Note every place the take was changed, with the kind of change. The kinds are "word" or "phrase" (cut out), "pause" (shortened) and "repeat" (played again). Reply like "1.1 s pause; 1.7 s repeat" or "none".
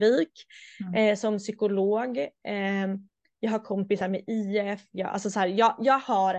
none